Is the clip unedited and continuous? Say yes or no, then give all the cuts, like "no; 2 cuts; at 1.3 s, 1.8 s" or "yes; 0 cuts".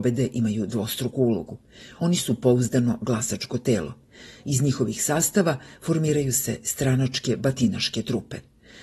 yes; 0 cuts